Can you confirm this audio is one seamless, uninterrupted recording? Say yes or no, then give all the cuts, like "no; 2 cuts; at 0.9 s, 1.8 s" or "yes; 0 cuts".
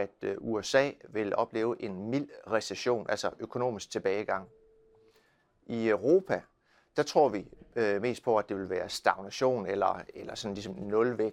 yes; 0 cuts